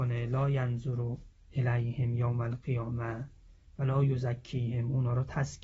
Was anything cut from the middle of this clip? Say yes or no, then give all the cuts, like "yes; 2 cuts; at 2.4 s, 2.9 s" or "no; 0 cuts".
no; 0 cuts